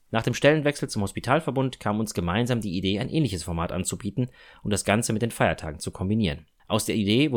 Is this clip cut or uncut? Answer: uncut